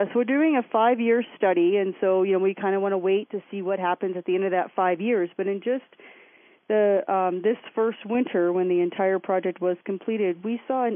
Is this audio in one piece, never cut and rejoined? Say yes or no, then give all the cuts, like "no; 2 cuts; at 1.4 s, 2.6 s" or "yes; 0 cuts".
yes; 0 cuts